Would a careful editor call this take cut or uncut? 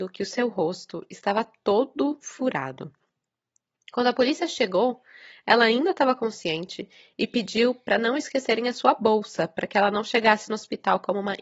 uncut